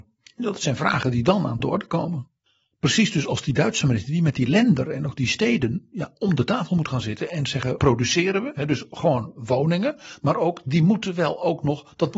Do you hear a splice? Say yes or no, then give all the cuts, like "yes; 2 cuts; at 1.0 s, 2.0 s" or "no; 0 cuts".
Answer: yes; 1 cut; at 7.8 s